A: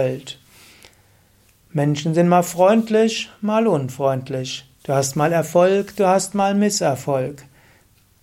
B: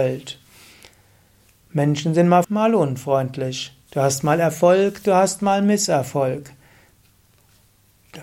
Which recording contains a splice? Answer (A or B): B